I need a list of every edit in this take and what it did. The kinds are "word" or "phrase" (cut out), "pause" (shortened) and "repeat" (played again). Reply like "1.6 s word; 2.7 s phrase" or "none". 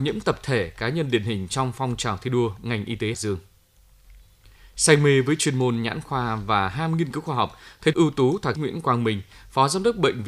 3.1 s word; 7.9 s word; 8.6 s word